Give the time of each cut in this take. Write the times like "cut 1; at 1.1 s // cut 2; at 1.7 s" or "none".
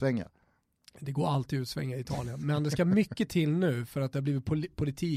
none